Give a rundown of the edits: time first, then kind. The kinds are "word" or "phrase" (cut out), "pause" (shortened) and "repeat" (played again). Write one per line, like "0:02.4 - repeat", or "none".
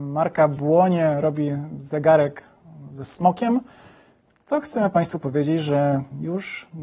none